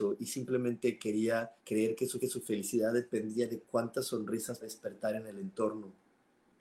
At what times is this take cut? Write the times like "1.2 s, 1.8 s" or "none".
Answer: 1.6 s, 2.2 s, 4.6 s